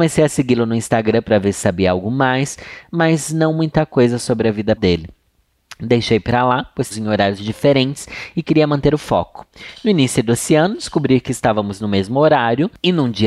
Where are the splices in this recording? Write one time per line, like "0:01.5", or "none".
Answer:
0:04.8
0:06.9